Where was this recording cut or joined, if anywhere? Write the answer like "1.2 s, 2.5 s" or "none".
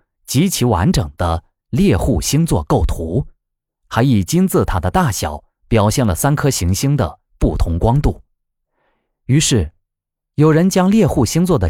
none